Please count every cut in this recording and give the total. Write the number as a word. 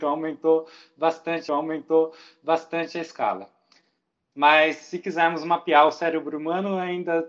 one